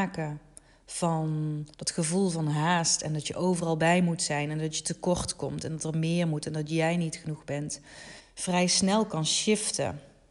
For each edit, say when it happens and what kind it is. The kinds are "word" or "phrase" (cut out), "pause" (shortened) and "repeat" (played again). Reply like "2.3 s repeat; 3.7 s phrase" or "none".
1.7 s pause; 8.2 s pause